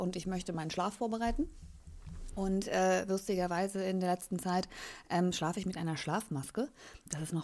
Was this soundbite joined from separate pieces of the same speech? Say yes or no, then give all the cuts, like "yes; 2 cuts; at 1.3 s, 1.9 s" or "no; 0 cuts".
no; 0 cuts